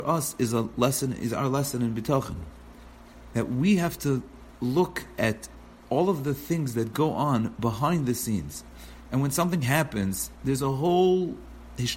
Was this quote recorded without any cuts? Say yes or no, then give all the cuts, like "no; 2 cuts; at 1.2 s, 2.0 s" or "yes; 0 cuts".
yes; 0 cuts